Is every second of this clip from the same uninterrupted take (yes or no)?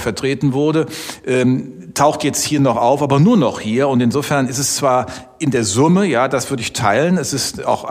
yes